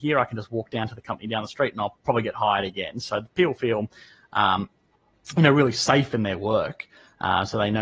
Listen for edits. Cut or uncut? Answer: uncut